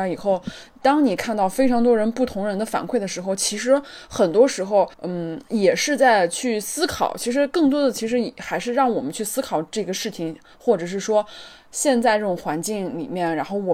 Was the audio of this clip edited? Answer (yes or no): yes